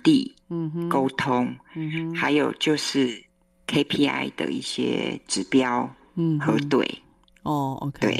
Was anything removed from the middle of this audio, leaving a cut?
no; 0 cuts

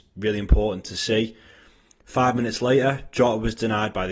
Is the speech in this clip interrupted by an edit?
no; 0 cuts

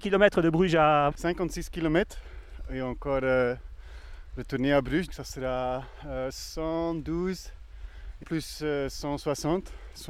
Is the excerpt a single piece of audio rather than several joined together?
no; 3 cuts; at 1.1 s, 5.1 s, 8.2 s

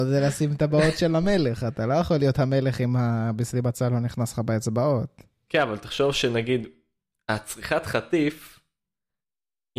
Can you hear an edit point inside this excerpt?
no; 0 cuts

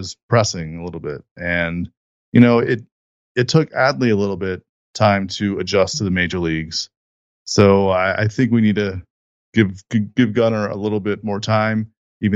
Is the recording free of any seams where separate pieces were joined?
yes; 0 cuts

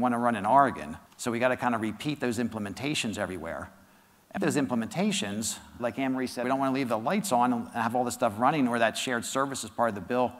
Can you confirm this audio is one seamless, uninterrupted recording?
no; 4 cuts; at 1.1 s, 4.4 s, 5.8 s, 6.4 s

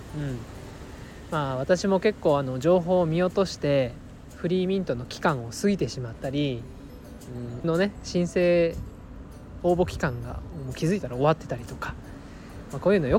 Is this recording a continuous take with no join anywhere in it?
no; 1 cut; at 7.6 s

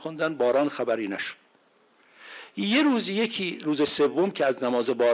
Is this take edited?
no; 0 cuts

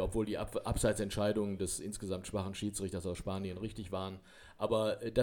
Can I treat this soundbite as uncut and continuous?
yes; 0 cuts

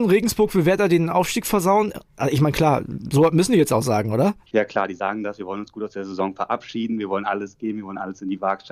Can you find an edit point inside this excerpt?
no; 0 cuts

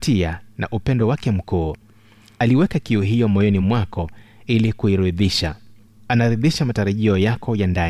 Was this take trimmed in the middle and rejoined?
no; 0 cuts

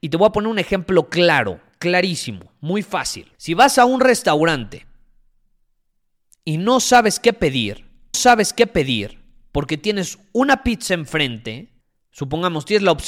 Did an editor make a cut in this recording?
yes; 3 cuts; at 3.3 s, 8.1 s, 11.8 s

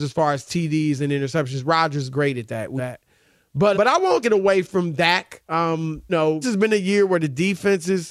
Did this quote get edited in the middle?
yes; 6 cuts; at 2.1 s, 2.8 s, 3.7 s, 4.2 s, 6.1 s, 6.4 s

